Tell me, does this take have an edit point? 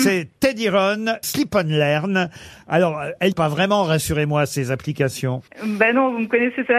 yes; 3 cuts; at 1.2 s, 3.3 s, 5.5 s

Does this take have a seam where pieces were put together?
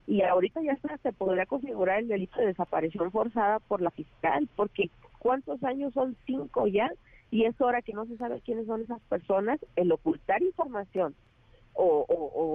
no; 0 cuts

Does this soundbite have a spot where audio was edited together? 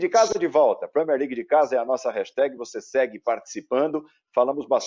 no; 0 cuts

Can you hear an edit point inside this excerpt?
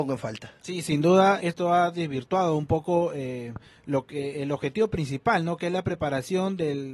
yes; 1 cut; at 1.4 s

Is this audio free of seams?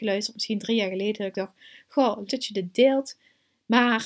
no; 1 cut; at 2.3 s

